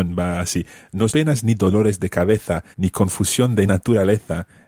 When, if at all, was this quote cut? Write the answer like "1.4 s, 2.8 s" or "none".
1.1 s, 2.7 s, 3.7 s